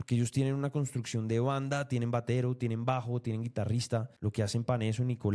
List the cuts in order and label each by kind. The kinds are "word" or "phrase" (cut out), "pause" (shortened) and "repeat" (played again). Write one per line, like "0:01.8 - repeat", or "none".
0:04.2 - pause